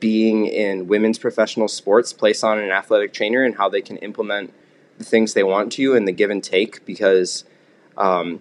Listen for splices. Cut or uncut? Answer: uncut